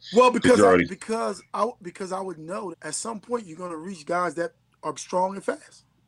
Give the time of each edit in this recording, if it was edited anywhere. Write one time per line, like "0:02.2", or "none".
0:02.7
0:04.9